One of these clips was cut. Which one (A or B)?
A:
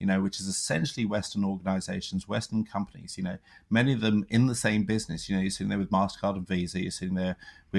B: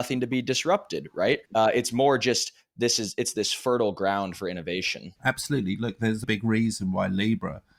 B